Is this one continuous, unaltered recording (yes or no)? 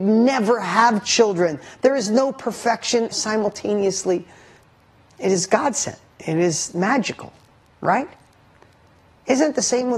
no